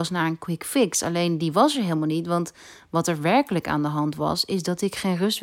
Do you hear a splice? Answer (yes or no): no